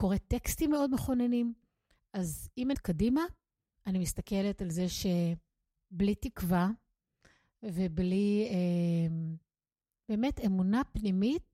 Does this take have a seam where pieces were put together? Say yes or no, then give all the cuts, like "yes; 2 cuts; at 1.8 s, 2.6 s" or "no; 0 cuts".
yes; 1 cut; at 2.7 s